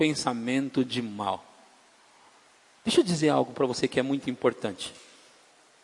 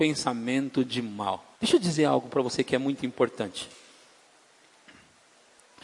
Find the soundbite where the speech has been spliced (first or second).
second